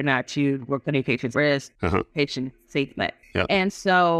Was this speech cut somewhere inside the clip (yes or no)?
yes